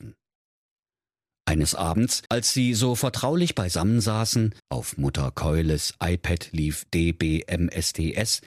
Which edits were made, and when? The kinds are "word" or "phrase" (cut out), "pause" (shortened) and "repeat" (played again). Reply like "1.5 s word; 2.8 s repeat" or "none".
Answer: 2.3 s pause; 4.6 s pause